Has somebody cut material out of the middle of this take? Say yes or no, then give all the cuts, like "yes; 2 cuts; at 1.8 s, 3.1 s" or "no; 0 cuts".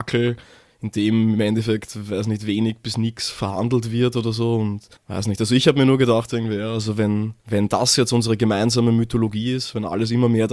yes; 2 cuts; at 5.0 s, 7.4 s